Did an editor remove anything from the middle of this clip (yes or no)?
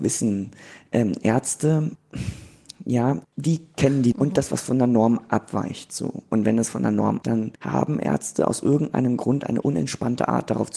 yes